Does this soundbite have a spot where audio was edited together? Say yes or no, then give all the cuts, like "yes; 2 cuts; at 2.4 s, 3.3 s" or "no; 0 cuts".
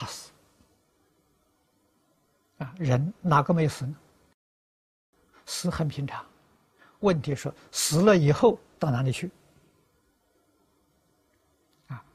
no; 0 cuts